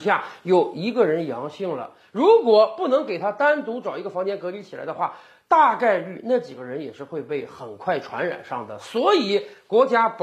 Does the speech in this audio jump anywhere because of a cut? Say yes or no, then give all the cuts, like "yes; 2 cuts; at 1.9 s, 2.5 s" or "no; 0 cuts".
no; 0 cuts